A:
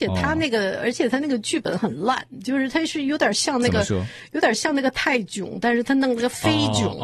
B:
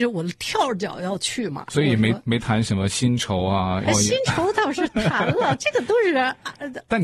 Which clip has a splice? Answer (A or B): B